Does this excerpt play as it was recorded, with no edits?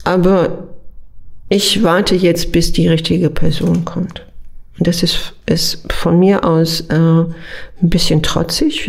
yes; 0 cuts

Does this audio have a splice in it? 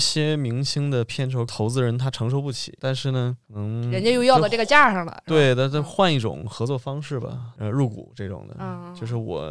no; 0 cuts

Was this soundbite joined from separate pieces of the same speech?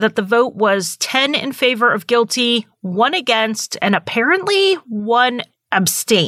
no; 0 cuts

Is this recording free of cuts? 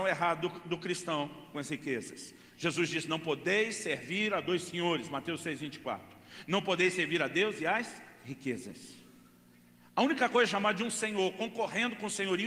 yes; 0 cuts

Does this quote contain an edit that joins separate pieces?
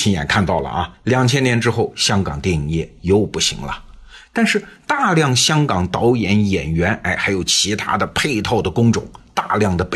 yes; 1 cut; at 0.9 s

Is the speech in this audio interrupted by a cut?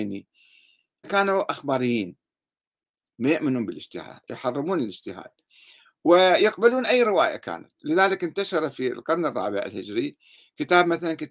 yes; 1 cut; at 1.0 s

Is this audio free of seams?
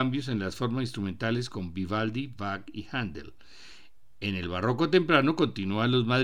yes; 0 cuts

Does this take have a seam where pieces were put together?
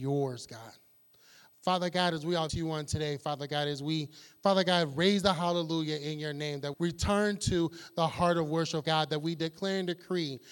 yes; 3 cuts; at 2.5 s, 6.7 s, 8.8 s

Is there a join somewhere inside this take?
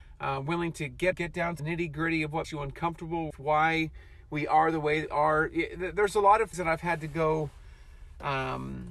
yes; 6 cuts; at 1.1 s, 1.6 s, 2.4 s, 3.3 s, 5.1 s, 6.5 s

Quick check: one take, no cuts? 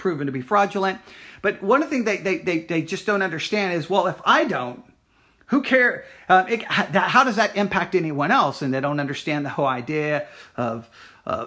yes; 0 cuts

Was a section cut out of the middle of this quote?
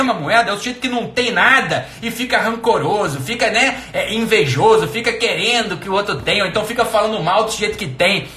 no; 0 cuts

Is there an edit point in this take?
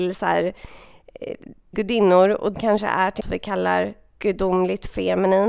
yes; 3 cuts; at 1.7 s, 2.5 s, 3.2 s

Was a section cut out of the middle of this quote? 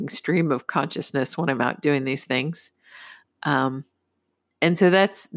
no; 0 cuts

